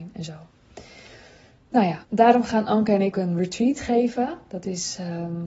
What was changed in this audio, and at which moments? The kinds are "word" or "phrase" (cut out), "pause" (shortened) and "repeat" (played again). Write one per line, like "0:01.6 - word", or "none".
0:02.0 - pause
0:03.1 - word